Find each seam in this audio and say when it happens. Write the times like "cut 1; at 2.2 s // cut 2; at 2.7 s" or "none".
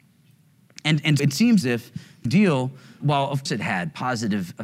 cut 1; at 1.2 s // cut 2; at 1.6 s // cut 3; at 2.3 s // cut 4; at 3.0 s // cut 5; at 3.5 s